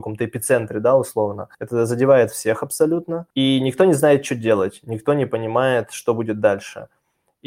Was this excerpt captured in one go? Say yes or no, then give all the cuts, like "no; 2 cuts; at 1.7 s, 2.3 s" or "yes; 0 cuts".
no; 2 cuts; at 1.5 s, 3.3 s